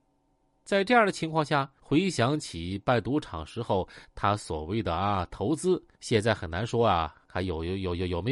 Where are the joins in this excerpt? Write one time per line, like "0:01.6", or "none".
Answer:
0:01.8
0:05.9
0:07.2